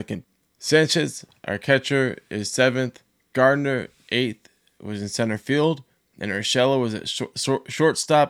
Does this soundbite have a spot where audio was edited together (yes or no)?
no